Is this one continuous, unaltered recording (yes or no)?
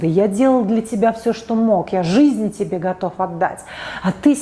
yes